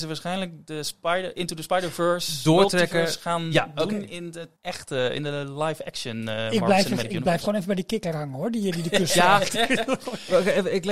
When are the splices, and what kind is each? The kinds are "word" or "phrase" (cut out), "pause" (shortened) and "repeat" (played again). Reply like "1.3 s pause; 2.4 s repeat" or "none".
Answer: 4.6 s pause

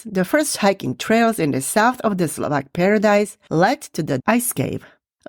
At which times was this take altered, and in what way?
4.2 s word

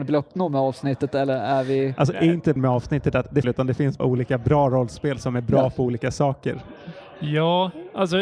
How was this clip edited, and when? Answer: 2.6 s word; 3.4 s phrase; 4.0 s word

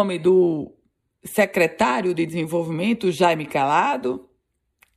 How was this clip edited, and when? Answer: none

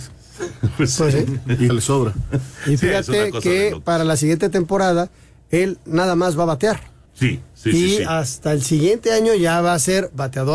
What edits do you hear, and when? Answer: 1.7 s word; 7.1 s pause

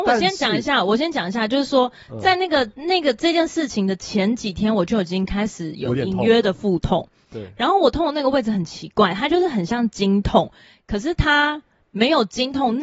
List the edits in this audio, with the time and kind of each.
none

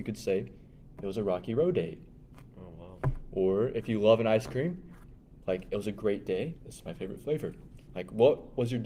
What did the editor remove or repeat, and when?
6.6 s pause

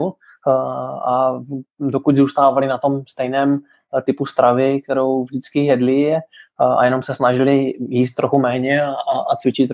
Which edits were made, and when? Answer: none

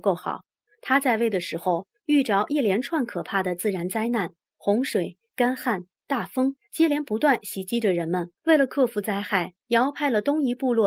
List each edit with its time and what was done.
8.4 s pause

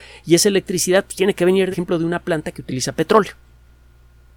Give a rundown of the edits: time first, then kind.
1.7 s phrase

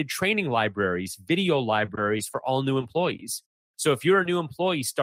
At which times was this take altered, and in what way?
none

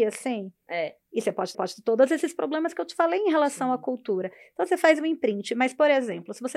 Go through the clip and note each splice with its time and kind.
1.5 s repeat

